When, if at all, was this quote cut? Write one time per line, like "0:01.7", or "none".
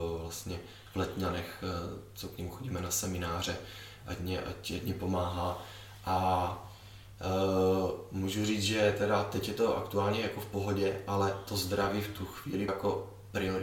0:12.7